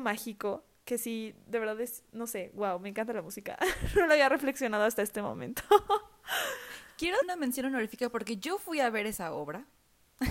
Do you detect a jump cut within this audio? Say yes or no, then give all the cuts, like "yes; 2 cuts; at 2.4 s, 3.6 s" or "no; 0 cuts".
yes; 1 cut; at 7.2 s